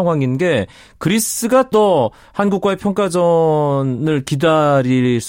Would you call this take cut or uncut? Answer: cut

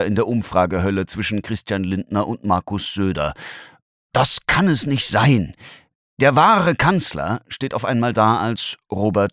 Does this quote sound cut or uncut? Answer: uncut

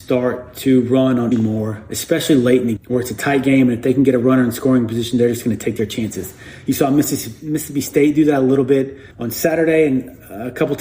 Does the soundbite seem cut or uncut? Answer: cut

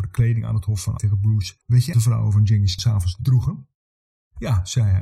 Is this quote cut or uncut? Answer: cut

